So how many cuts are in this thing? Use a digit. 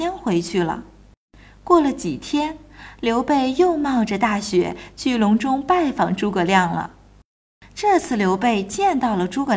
0